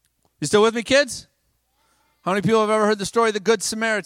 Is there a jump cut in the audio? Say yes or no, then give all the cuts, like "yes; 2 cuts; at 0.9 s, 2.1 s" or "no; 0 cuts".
no; 0 cuts